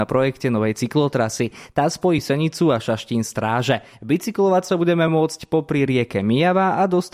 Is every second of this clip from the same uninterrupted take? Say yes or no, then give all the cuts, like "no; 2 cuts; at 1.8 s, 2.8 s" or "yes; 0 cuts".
yes; 0 cuts